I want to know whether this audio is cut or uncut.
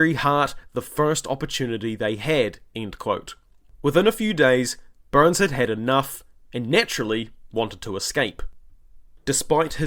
uncut